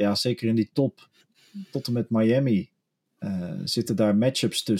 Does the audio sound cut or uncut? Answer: uncut